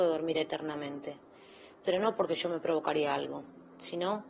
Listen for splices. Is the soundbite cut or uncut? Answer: uncut